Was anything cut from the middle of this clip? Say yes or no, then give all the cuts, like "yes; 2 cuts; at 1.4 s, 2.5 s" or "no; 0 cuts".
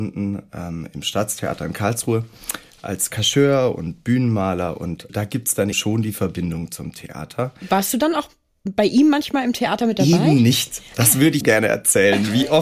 yes; 3 cuts; at 5.1 s, 5.7 s, 11.4 s